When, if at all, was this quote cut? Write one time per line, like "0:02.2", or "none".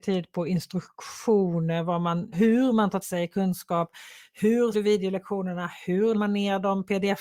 0:02.3
0:03.0
0:04.7
0:06.1

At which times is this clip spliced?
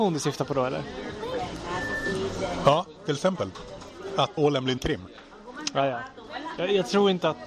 0:04.4
0:04.8

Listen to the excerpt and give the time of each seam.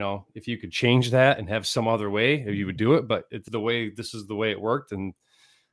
0:03.5

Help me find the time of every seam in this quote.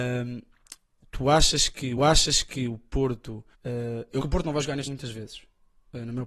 0:02.0
0:03.5
0:04.2
0:04.9

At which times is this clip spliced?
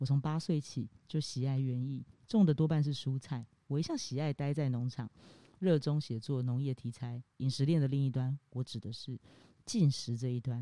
none

